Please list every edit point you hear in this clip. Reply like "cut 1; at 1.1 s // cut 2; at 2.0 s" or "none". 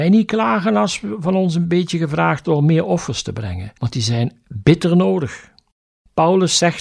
cut 1; at 3.8 s